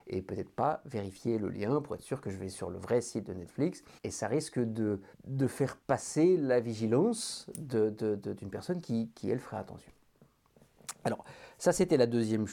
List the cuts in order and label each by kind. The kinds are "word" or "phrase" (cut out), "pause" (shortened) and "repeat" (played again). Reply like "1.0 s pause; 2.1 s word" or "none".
4.0 s pause; 5.1 s pause; 5.8 s pause